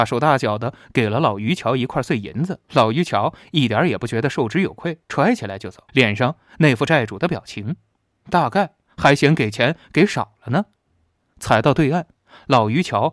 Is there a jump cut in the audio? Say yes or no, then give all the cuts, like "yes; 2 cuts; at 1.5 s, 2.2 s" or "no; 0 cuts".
yes; 3 cuts; at 2.6 s, 5.0 s, 5.9 s